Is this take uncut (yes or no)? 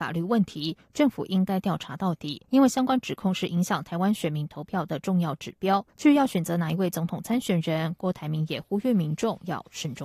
no